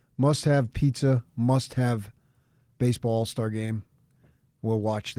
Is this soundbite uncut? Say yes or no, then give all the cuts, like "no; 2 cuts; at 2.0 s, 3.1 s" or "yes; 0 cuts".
yes; 0 cuts